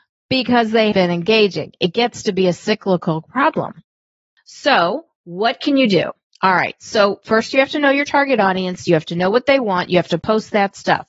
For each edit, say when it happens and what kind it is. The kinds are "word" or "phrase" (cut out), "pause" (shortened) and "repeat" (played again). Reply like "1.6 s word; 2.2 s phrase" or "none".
0.9 s word